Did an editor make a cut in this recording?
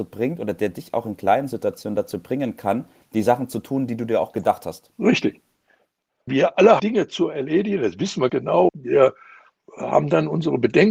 yes; 4 cuts; at 6.3 s, 6.8 s, 8.3 s, 8.7 s

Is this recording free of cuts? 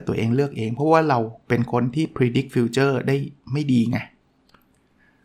yes; 0 cuts

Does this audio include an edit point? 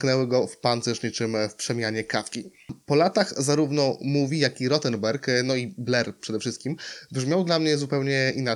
no; 0 cuts

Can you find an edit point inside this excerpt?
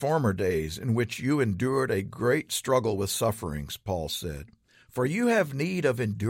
no; 0 cuts

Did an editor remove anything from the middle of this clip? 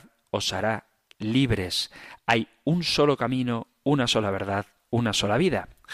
no; 0 cuts

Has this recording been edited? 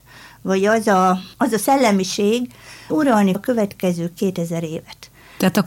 yes; 2 cuts; at 2.9 s, 3.3 s

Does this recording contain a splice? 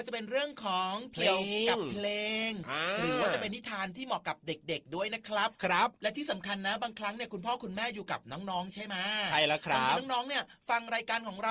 yes; 1 cut; at 5.5 s

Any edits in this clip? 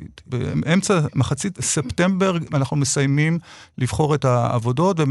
no; 0 cuts

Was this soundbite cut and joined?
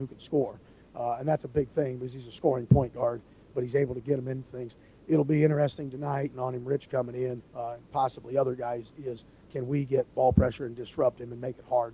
yes; 2 cuts; at 6.3 s, 7.5 s

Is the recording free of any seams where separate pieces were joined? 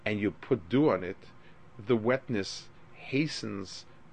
yes; 0 cuts

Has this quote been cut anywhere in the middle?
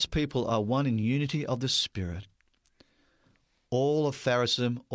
no; 0 cuts

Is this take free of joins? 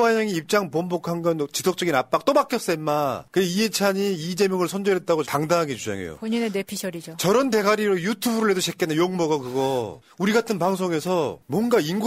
no; 1 cut; at 5.2 s

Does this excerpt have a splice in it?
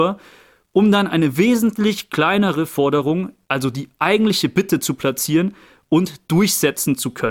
no; 0 cuts

